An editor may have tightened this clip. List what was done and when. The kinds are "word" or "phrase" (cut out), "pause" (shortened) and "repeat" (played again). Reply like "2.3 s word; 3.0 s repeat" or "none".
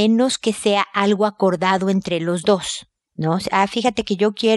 none